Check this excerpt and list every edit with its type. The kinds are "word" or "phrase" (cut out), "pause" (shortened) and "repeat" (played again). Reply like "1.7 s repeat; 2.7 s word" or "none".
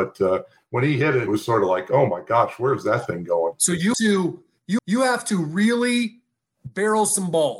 1.3 s word; 3.9 s phrase; 4.8 s repeat